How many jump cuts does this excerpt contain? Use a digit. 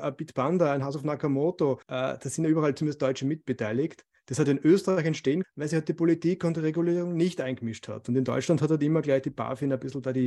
2